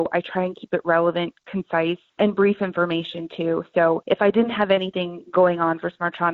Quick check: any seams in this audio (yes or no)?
no